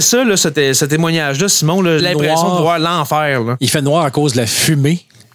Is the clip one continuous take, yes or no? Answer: no